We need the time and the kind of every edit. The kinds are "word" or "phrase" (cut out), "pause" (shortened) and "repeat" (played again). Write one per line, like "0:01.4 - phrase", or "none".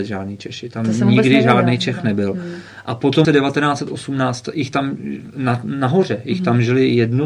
0:03.2 - word